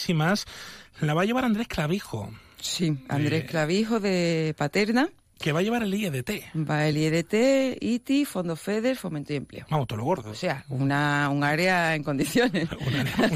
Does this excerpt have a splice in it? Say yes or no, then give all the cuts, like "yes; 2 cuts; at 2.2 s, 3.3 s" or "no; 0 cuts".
no; 0 cuts